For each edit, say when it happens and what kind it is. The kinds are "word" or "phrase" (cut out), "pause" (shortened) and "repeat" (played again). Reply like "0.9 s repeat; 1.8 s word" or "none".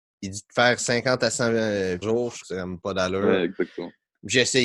2.0 s phrase; 2.4 s word